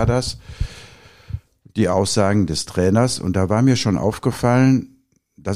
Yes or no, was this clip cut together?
no